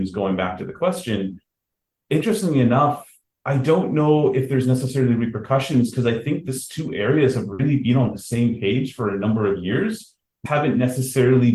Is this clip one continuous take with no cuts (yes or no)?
no